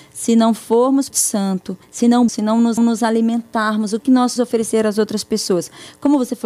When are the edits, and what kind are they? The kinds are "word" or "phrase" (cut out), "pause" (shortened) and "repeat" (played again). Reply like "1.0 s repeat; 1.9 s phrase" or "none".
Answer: 1.1 s phrase; 1.8 s pause; 2.3 s word; 2.8 s repeat; 4.0 s word; 4.4 s word